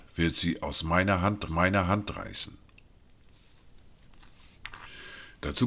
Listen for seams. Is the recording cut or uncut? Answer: cut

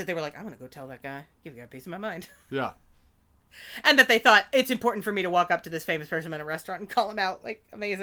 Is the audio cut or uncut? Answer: uncut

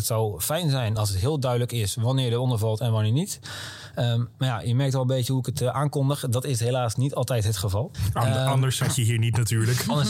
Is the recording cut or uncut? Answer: uncut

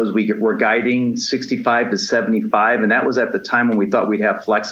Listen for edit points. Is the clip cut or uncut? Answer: uncut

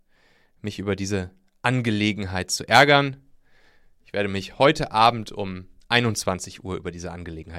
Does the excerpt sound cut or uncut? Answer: uncut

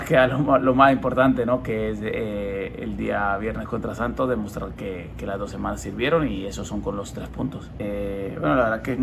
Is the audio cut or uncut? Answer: uncut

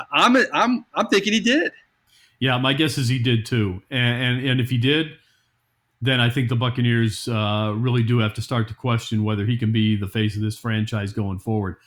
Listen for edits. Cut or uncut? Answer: uncut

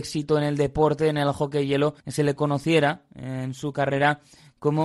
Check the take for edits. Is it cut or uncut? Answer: cut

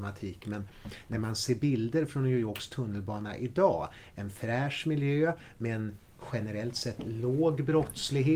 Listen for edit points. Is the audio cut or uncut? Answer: uncut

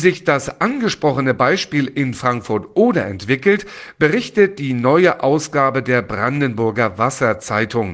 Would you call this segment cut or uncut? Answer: uncut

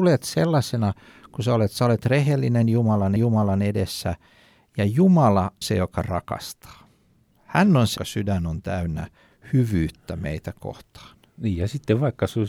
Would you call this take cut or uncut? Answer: cut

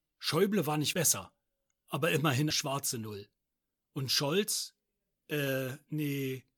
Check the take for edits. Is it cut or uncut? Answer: cut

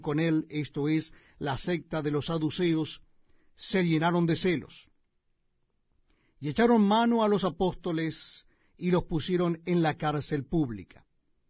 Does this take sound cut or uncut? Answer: uncut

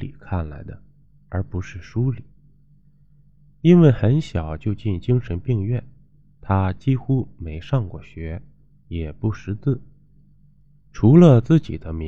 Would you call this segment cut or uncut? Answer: uncut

